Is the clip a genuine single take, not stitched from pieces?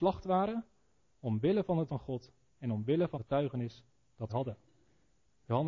no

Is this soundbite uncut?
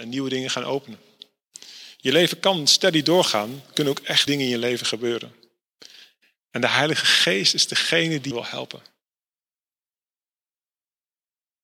no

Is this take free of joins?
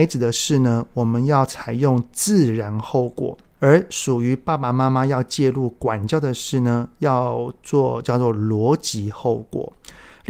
yes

